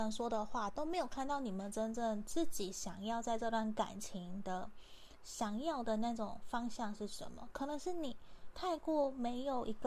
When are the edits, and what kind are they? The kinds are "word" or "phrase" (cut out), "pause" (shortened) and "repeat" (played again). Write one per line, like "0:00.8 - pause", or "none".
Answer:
0:08.5 - phrase